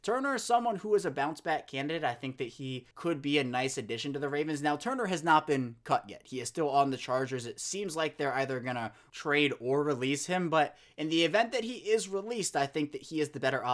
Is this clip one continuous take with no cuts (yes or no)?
no